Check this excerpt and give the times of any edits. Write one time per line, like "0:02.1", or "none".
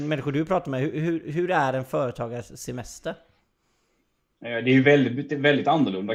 none